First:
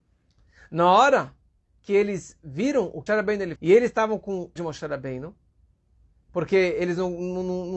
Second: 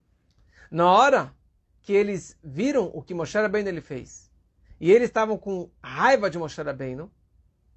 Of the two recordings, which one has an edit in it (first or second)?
first